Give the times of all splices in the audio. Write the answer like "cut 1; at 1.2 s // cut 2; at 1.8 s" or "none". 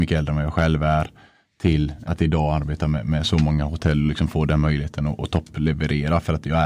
cut 1; at 2.0 s